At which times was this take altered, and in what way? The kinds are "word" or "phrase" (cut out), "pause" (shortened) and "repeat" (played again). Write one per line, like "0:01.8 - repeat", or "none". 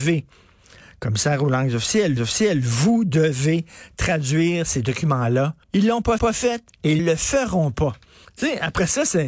0:02.2 - repeat
0:05.6 - pause
0:06.2 - repeat
0:07.0 - word
0:08.2 - pause